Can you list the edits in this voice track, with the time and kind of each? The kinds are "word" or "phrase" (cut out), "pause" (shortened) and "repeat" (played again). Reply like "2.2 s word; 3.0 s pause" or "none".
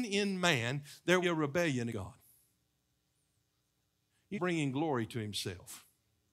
1.2 s phrase; 1.9 s word; 4.3 s phrase